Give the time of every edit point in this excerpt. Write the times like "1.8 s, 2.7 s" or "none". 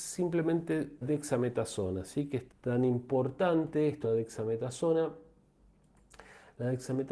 1.0 s, 2.5 s, 4.0 s